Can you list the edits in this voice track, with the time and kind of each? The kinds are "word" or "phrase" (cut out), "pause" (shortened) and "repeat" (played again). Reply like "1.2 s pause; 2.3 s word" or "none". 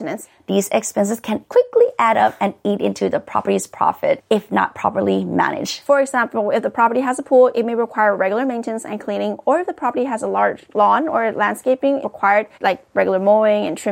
12.0 s word; 12.5 s pause